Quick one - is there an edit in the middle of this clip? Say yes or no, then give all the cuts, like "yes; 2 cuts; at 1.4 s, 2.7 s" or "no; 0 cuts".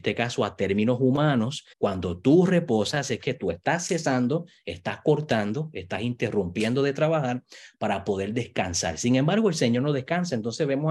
yes; 1 cut; at 1.7 s